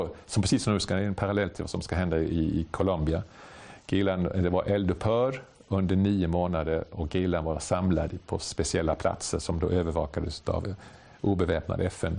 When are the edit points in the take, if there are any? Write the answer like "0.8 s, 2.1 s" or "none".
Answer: none